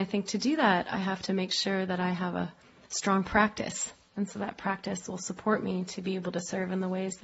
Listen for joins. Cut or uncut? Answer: uncut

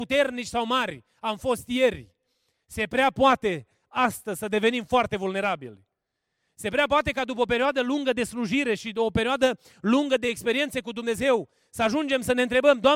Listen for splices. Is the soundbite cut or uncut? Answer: uncut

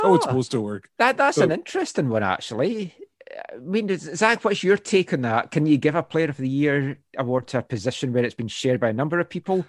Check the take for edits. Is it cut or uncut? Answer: cut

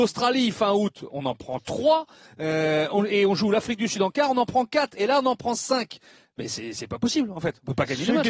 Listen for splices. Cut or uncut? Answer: uncut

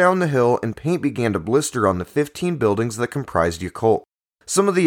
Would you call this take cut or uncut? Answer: uncut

